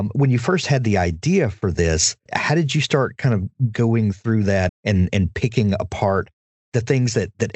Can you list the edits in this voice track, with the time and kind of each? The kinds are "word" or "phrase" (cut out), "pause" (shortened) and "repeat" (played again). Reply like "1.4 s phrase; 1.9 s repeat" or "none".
2.3 s word; 4.7 s word